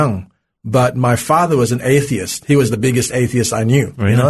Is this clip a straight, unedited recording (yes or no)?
yes